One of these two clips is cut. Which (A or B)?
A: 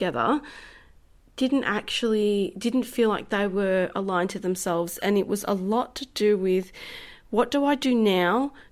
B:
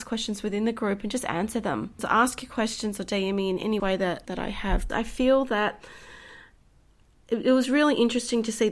B